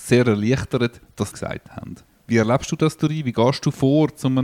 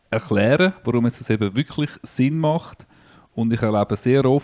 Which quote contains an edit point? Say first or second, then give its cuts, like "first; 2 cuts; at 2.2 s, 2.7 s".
first; 2 cuts; at 1.3 s, 2.1 s